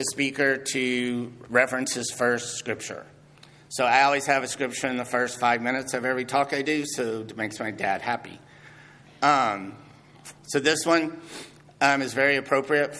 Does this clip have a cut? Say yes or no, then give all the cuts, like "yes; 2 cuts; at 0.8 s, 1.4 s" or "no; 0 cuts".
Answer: no; 0 cuts